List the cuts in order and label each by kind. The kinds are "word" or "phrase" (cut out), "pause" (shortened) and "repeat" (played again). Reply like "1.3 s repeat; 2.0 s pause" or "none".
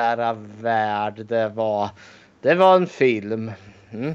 none